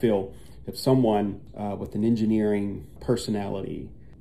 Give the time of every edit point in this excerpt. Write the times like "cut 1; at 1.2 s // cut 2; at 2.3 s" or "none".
none